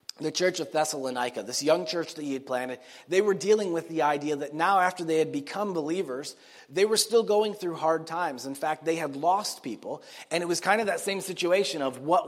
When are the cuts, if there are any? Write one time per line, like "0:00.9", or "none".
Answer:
none

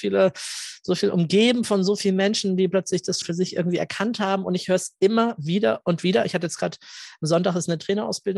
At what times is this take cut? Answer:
0:03.2

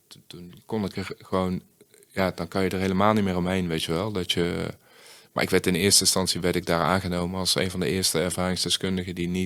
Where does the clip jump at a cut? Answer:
none

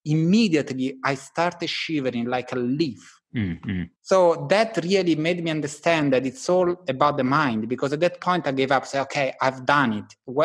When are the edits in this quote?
0:03.2
0:04.0

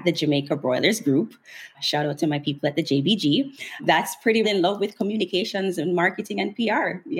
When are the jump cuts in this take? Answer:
0:04.4

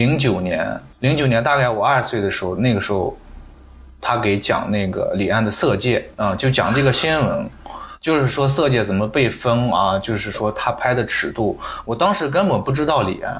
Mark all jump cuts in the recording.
0:00.9
0:06.1

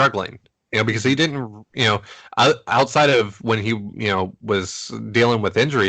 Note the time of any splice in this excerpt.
none

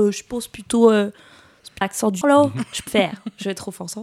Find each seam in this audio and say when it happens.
0:01.8
0:02.2
0:02.9

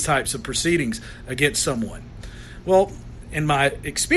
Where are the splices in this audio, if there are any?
none

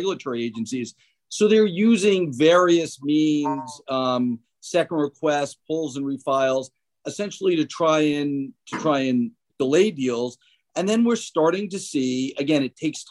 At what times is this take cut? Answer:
none

